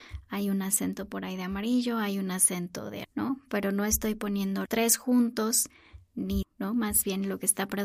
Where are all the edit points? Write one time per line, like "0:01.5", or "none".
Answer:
0:03.0
0:04.7
0:06.4